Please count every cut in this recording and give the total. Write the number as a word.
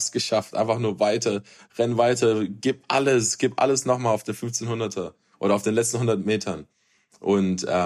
zero